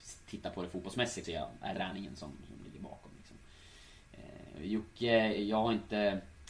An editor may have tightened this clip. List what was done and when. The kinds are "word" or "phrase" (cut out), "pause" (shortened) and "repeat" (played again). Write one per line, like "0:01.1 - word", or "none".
0:01.2 - word
0:01.7 - phrase